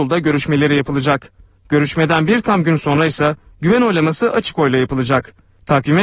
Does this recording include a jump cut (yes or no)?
no